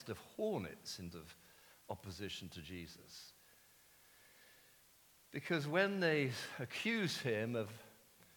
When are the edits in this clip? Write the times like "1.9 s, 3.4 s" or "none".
1.1 s